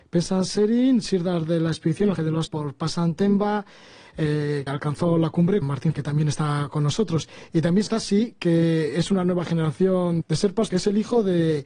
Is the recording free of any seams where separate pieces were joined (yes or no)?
no